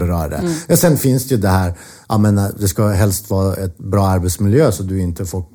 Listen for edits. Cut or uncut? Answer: uncut